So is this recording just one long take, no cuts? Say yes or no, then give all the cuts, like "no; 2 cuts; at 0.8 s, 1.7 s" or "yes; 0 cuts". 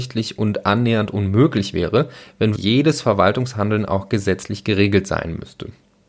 no; 1 cut; at 2.5 s